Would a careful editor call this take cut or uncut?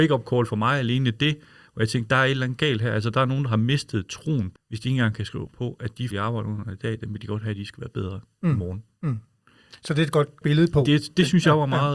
cut